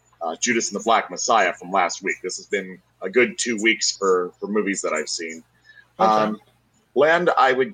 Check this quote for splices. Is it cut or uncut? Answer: cut